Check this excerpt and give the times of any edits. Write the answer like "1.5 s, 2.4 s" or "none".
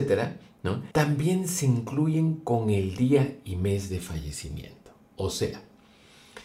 0.9 s